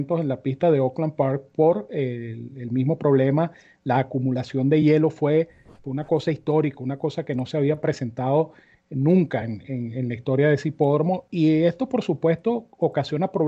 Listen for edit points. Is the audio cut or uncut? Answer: uncut